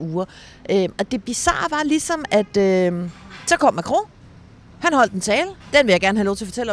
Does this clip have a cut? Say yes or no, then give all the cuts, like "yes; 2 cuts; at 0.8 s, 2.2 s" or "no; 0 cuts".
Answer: no; 0 cuts